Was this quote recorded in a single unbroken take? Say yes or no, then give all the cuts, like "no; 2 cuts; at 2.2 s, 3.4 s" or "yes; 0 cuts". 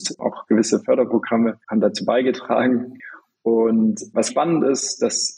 no; 2 cuts; at 1.6 s, 4.3 s